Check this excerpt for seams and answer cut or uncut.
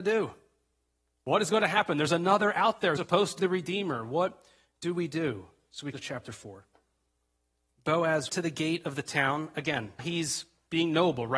cut